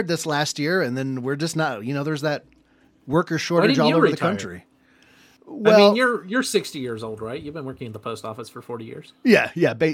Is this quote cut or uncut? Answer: uncut